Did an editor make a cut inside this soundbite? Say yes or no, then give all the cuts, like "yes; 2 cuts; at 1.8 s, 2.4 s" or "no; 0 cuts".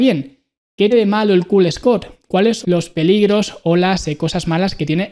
yes; 2 cuts; at 0.9 s, 2.6 s